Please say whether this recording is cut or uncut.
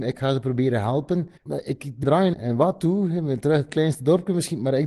cut